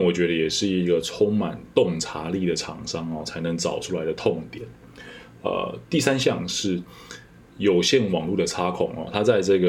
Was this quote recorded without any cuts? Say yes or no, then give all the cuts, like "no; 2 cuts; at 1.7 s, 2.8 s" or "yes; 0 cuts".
yes; 0 cuts